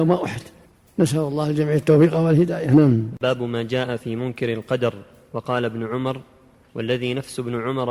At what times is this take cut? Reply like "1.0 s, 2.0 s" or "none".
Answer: none